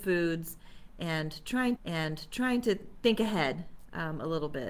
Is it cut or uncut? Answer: cut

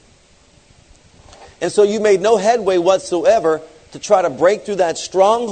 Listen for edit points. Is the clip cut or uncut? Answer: uncut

